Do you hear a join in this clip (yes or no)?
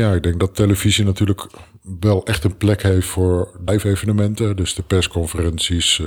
yes